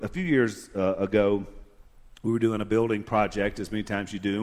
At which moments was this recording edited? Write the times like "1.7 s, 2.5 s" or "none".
none